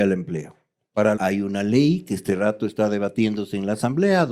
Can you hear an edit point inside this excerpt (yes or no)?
yes